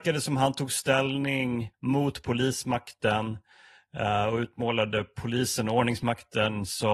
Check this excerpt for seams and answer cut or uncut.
cut